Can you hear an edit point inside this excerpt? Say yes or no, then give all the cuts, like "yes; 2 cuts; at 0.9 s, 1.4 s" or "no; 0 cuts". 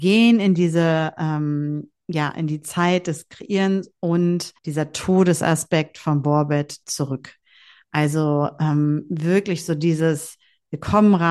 yes; 2 cuts; at 4.6 s, 6.8 s